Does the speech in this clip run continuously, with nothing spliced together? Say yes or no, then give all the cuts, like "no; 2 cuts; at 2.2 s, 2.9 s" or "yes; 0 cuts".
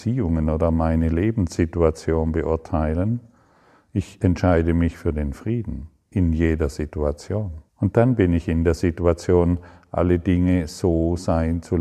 no; 1 cut; at 7.7 s